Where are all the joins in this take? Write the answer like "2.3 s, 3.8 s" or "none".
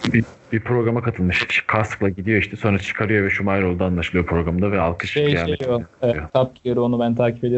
6.3 s